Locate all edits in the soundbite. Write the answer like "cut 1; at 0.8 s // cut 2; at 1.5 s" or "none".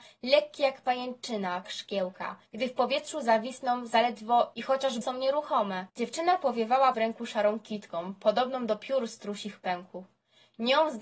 cut 1; at 1.6 s // cut 2; at 2.5 s // cut 3; at 4.5 s // cut 4; at 5.0 s // cut 5; at 5.9 s // cut 6; at 6.9 s